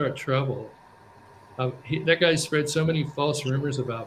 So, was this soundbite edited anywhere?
no; 0 cuts

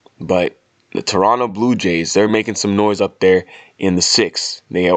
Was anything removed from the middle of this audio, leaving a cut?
no; 0 cuts

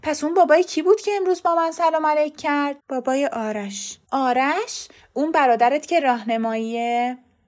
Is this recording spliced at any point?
yes; 2 cuts; at 2.8 s, 4.1 s

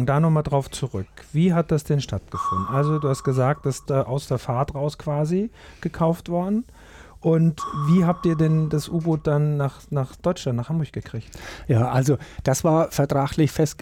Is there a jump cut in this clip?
yes; 1 cut; at 3.9 s

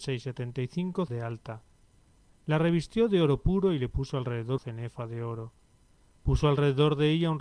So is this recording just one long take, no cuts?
no; 2 cuts; at 1.1 s, 4.6 s

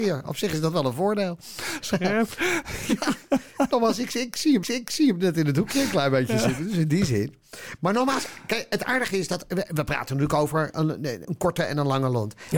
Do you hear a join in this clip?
yes; 2 cuts; at 4.6 s, 11.2 s

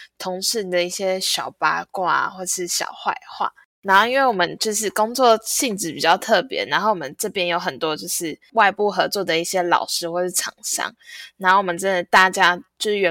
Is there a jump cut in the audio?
no; 0 cuts

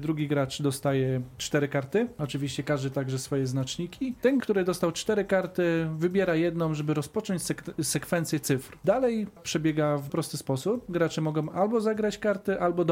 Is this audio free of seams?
no; 3 cuts; at 4.4 s, 9.4 s, 10.1 s

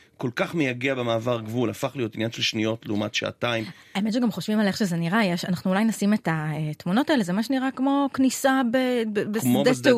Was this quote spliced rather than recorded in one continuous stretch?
no; 0 cuts

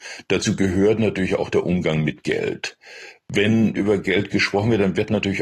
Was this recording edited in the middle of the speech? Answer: yes; 1 cut; at 3.7 s

